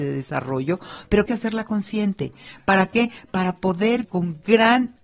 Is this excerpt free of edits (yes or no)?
no